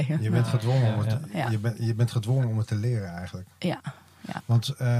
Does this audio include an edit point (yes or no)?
no